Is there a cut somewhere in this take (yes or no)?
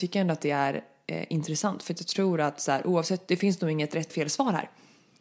yes